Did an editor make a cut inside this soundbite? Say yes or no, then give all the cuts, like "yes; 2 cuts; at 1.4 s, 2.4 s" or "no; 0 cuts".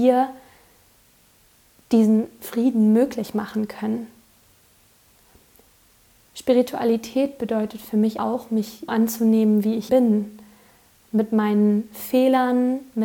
yes; 3 cuts; at 8.2 s, 8.9 s, 9.9 s